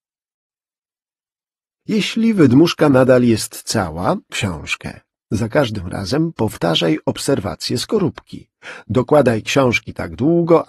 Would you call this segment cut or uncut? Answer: cut